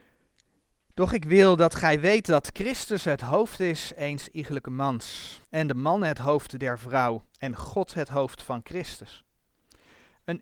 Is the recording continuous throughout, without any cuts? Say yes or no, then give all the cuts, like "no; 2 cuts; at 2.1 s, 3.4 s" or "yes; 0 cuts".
no; 2 cuts; at 5.4 s, 7.3 s